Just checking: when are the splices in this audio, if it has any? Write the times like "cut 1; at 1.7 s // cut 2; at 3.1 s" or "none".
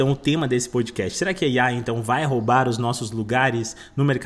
none